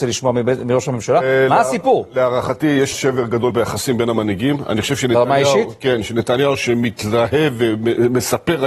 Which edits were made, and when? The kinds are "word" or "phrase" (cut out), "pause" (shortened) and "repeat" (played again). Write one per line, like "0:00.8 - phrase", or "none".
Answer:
0:02.9 - word
0:03.5 - word